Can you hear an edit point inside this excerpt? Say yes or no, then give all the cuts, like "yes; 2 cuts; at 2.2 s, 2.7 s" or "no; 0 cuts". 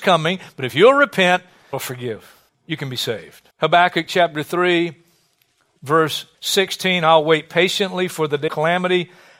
yes; 5 cuts; at 1.7 s, 2.5 s, 3.5 s, 6.3 s, 8.5 s